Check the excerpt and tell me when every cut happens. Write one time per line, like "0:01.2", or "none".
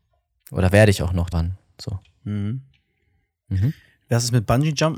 0:01.3